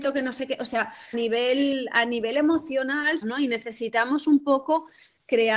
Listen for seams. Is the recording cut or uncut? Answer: cut